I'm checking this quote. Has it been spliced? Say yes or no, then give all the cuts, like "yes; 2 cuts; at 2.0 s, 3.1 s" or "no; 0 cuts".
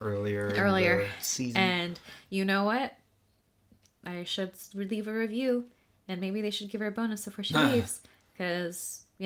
no; 0 cuts